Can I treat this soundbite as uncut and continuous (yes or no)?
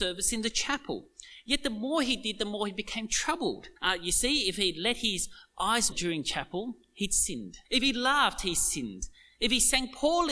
no